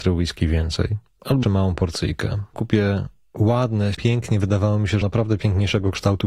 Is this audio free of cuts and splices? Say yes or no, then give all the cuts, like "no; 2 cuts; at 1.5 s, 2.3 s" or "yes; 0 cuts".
no; 4 cuts; at 1.4 s, 2.5 s, 3.9 s, 5.0 s